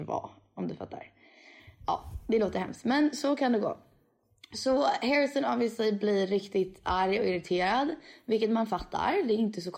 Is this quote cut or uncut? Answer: uncut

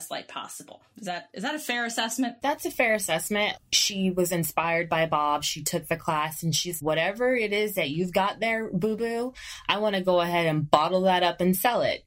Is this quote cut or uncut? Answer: cut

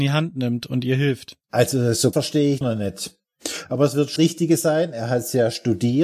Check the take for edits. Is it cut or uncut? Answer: cut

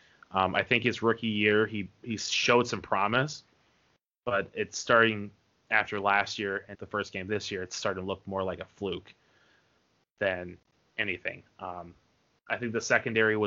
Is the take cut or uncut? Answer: cut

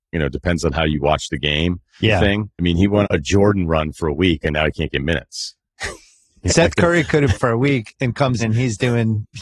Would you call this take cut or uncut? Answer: cut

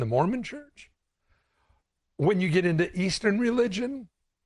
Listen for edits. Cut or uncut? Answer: uncut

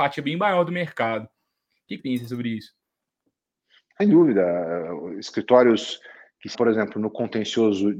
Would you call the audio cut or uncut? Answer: cut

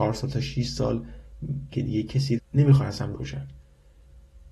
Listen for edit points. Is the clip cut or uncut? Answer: cut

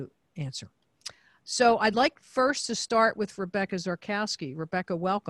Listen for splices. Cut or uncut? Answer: uncut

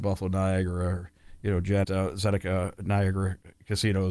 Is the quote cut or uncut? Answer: cut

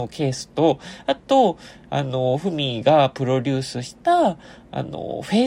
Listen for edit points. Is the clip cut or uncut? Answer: cut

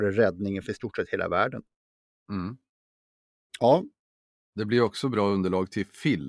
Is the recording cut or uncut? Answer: uncut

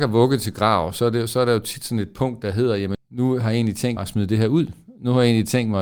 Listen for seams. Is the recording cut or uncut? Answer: cut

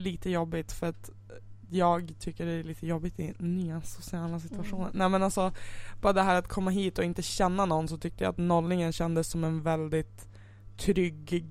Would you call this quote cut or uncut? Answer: uncut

